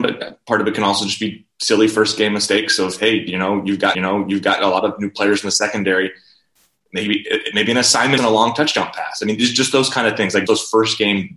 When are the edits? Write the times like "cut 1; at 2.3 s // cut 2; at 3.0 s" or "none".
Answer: cut 1; at 3.9 s // cut 2; at 8.2 s // cut 3; at 10.5 s